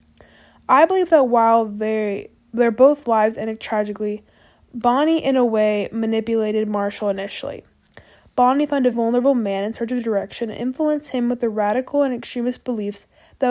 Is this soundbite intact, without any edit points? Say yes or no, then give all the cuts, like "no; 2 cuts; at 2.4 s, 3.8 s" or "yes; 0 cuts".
no; 1 cut; at 8.9 s